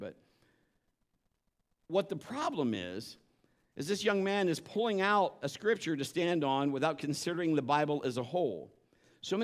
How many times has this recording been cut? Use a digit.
0